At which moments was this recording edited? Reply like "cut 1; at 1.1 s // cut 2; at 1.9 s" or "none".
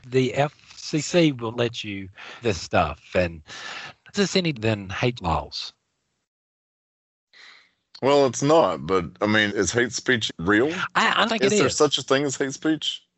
cut 1; at 1.5 s // cut 2; at 2.4 s // cut 3; at 4.1 s // cut 4; at 4.5 s // cut 5; at 5.2 s // cut 6; at 9.5 s // cut 7; at 10.3 s // cut 8; at 11.3 s